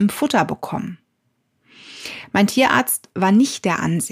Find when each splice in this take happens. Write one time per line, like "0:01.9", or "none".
none